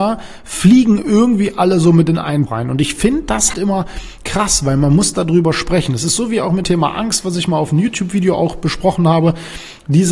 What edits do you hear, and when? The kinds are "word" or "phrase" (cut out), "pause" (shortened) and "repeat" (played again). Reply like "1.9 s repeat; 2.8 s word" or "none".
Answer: 2.5 s word; 3.5 s word; 6.6 s word